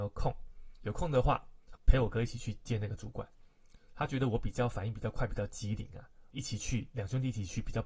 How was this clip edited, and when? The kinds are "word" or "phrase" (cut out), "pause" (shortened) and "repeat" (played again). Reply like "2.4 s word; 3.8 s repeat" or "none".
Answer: 1.7 s word; 6.3 s phrase